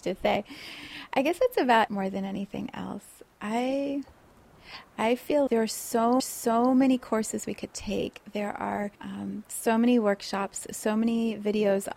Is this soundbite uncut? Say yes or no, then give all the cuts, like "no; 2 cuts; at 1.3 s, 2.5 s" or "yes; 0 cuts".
no; 4 cuts; at 1.9 s, 5.5 s, 6.2 s, 8.9 s